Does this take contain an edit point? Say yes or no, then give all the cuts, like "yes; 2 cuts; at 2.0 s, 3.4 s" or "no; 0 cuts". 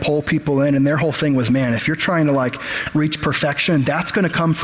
no; 0 cuts